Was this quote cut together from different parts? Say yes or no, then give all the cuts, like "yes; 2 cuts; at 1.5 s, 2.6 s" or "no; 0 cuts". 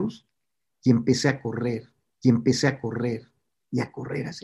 yes; 1 cut; at 2.2 s